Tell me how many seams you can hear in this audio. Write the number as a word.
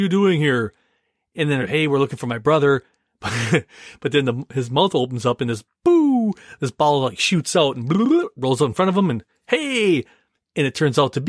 zero